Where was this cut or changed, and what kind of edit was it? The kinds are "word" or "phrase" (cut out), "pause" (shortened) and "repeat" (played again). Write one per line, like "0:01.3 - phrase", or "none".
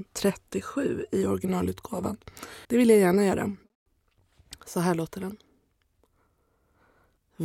0:02.6 - pause